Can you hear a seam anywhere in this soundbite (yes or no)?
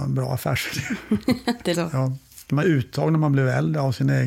yes